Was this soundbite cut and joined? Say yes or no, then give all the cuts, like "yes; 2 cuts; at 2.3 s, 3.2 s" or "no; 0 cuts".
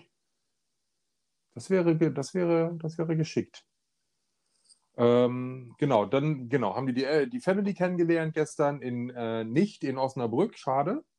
no; 0 cuts